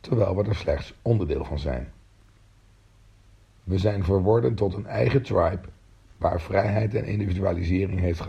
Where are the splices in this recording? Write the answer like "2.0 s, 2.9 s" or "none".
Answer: none